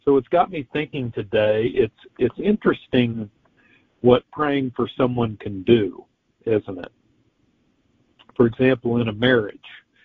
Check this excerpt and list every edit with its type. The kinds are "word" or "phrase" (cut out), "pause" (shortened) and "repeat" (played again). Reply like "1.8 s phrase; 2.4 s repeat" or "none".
none